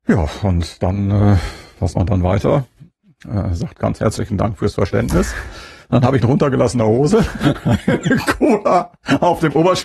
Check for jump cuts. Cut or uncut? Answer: cut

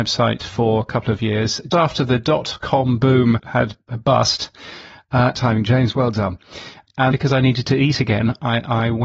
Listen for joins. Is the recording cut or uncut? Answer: cut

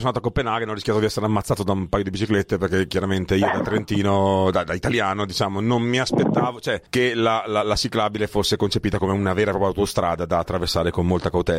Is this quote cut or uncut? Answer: cut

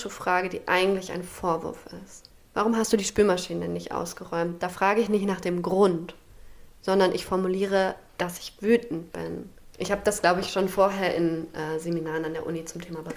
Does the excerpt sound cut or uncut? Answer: cut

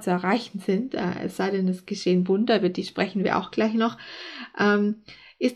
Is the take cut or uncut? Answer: uncut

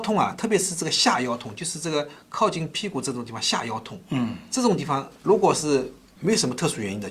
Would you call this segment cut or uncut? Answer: uncut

